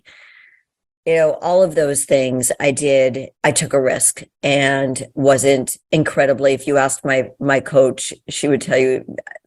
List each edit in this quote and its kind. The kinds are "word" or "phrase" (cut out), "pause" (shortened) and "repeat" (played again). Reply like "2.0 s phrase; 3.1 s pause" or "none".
3.3 s pause; 4.3 s pause; 5.8 s pause